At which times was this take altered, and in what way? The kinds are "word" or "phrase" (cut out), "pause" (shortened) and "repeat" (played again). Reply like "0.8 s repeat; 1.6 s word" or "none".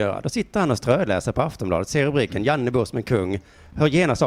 none